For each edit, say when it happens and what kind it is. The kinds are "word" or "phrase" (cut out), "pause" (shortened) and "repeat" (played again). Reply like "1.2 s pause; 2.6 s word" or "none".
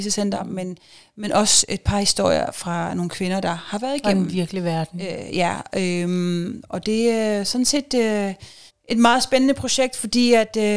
8.7 s pause